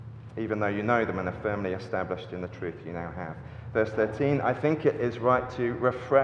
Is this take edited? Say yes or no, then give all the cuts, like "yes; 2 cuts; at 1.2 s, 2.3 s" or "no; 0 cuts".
no; 0 cuts